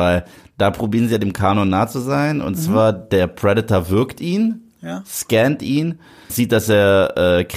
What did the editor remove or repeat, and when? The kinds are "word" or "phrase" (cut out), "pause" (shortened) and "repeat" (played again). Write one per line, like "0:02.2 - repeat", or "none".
0:06.3 - word